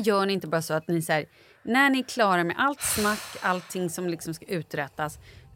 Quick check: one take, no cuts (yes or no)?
yes